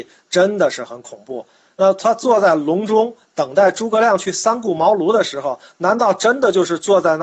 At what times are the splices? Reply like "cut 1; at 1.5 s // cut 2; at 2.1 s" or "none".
none